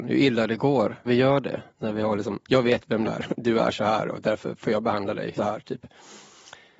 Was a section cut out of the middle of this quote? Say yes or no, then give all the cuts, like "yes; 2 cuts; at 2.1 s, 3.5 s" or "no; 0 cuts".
yes; 4 cuts; at 1.1 s, 2.4 s, 3.0 s, 5.4 s